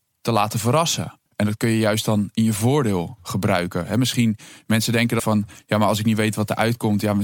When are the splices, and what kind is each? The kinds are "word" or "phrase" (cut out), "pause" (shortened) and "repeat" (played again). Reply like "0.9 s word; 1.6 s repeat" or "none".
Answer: 1.3 s pause; 5.2 s word